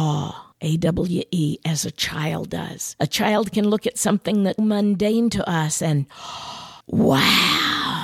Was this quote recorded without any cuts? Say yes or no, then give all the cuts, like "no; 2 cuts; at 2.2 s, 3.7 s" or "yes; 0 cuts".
no; 2 cuts; at 4.6 s, 6.8 s